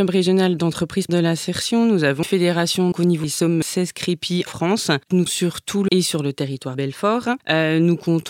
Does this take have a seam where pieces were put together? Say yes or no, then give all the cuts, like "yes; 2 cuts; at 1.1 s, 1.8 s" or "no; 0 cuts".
yes; 9 cuts; at 1.1 s, 2.2 s, 2.9 s, 3.2 s, 3.6 s, 4.5 s, 5.3 s, 5.9 s, 6.7 s